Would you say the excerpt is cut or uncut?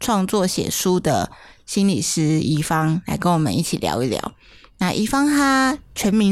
uncut